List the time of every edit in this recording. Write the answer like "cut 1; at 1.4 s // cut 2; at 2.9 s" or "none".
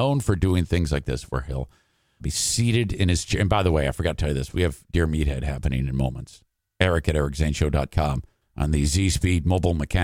cut 1; at 2.2 s // cut 2; at 8.4 s